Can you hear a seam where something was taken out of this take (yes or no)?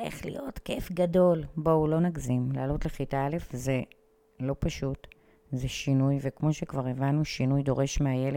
no